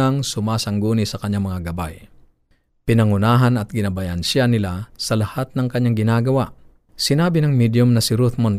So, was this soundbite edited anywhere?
no; 0 cuts

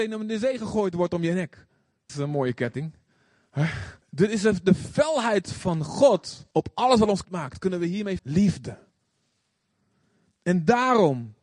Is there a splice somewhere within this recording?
yes; 5 cuts; at 2.1 s, 4.0 s, 6.5 s, 7.2 s, 8.2 s

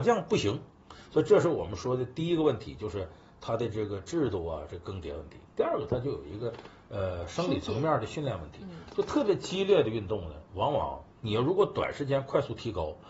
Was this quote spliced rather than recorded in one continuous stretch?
no; 0 cuts

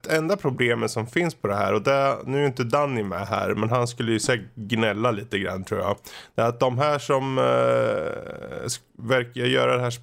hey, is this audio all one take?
yes; 0 cuts

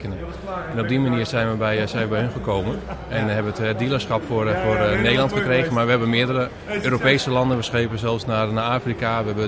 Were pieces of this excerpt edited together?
no; 0 cuts

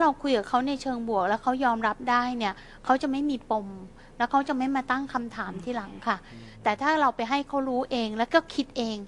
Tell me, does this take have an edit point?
no; 0 cuts

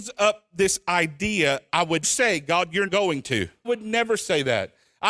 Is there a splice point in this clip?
yes; 4 cuts; at 1.7 s, 2.0 s, 2.9 s, 3.6 s

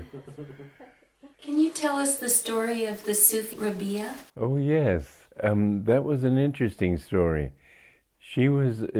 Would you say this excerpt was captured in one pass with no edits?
no; 4 cuts; at 1.3 s, 3.5 s, 4.3 s, 5.3 s

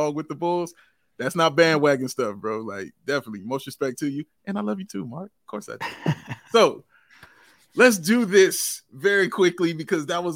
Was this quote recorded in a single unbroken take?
yes; 0 cuts

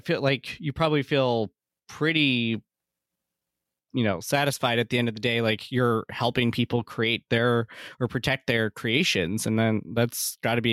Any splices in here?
no; 0 cuts

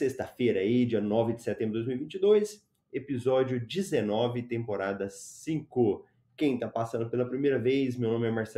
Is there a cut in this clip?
no; 0 cuts

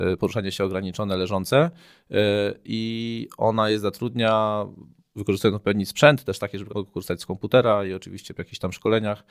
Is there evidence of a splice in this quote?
yes; 1 cut; at 6.7 s

